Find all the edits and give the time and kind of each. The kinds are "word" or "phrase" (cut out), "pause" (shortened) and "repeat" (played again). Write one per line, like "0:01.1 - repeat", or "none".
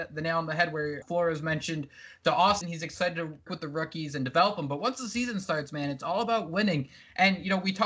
0:01.0 - word
0:02.6 - word
0:03.5 - word